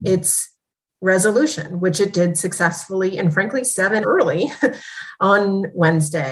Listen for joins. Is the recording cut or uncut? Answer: cut